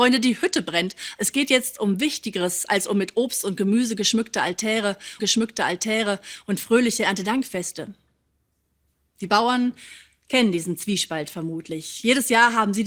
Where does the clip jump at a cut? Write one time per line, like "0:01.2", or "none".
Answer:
0:05.2

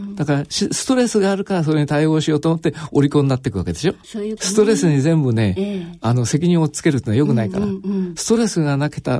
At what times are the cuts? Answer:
0:04.0
0:04.4

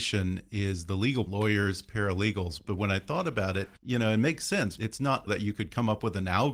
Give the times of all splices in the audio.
0:01.3
0:03.8
0:04.8
0:05.3

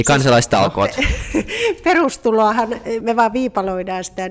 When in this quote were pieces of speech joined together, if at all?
0:03.0

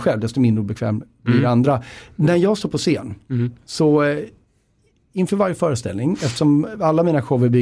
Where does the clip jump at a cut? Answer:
none

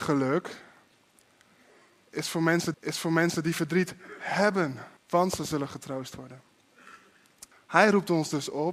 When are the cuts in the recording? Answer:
0:02.7
0:05.0
0:07.5

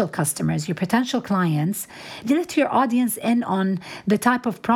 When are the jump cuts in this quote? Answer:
0:02.2

